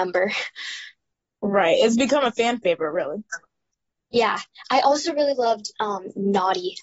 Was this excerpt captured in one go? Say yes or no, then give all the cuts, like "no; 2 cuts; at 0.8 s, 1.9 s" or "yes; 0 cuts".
yes; 0 cuts